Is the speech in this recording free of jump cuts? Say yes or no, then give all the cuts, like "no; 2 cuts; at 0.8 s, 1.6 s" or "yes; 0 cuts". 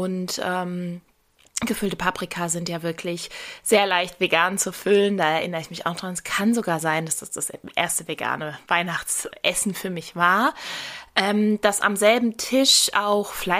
yes; 0 cuts